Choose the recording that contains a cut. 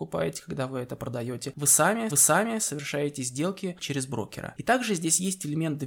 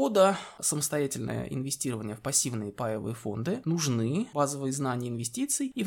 first; 2 cuts; at 2.1 s, 3.8 s

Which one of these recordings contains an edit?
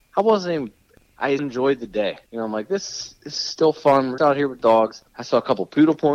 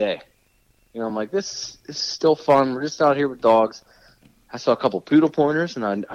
first; 4 cuts; at 1.4 s, 2.3 s, 4.2 s, 5.1 s

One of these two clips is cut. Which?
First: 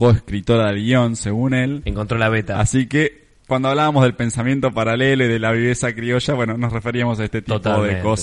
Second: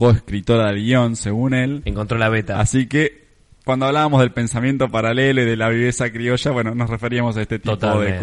first; 1 cut; at 3.4 s

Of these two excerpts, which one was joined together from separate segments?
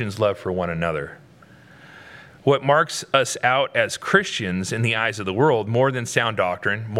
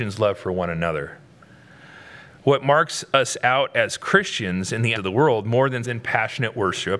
second; 2 cuts; at 5.0 s, 5.8 s

